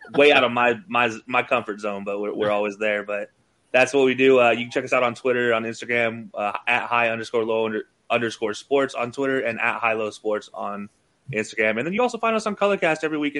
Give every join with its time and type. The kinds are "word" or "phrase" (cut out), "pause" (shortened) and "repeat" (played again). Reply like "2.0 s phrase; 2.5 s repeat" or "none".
none

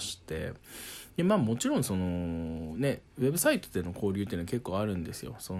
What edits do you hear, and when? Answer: 3.1 s pause

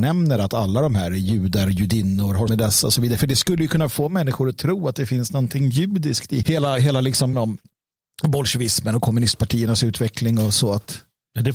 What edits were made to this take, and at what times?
2.5 s word; 6.4 s word; 7.3 s word

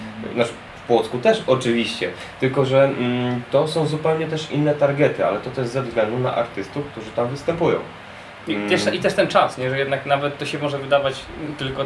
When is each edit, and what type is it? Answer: none

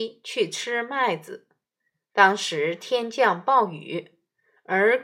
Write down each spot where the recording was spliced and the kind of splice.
none

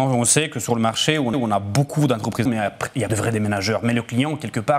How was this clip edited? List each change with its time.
1.3 s repeat; 2.5 s phrase; 3.1 s word

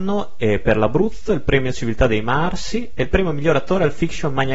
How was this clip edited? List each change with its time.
none

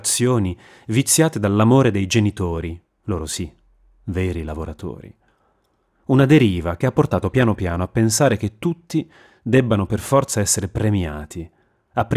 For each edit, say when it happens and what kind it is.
none

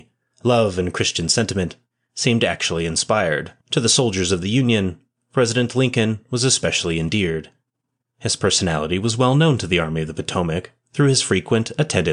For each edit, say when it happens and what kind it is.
3.6 s pause

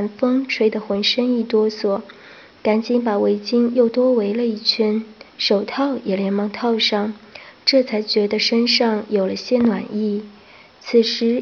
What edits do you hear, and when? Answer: 5.3 s pause

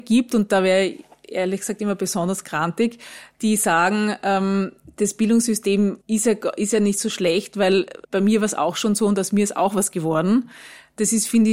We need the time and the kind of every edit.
6.0 s pause; 8.0 s pause

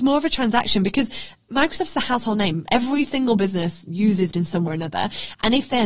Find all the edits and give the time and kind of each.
4.3 s word; 4.7 s word

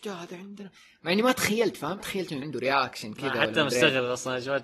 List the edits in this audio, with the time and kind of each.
2.0 s phrase; 2.4 s word

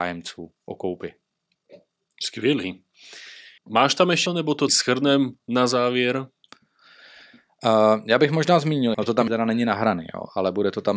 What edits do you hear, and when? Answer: 3.6 s pause; 4.3 s word; 4.7 s word; 8.9 s word; 9.3 s word

